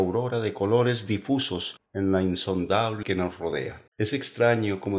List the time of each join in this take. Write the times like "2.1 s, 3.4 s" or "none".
1.9 s, 3.0 s, 3.9 s